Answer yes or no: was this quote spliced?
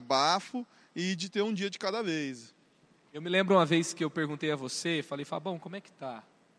no